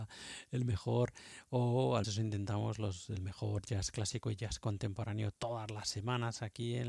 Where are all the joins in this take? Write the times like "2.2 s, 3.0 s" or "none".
2.0 s